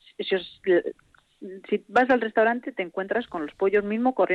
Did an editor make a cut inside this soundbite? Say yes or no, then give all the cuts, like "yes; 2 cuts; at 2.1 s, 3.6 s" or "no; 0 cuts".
no; 0 cuts